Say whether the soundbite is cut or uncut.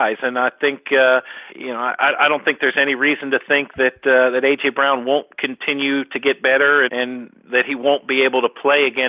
cut